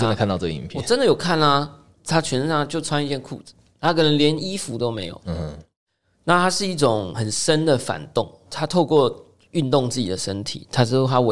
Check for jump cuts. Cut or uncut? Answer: uncut